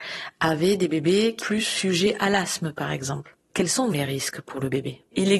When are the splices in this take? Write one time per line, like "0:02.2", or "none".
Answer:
0:01.4
0:03.9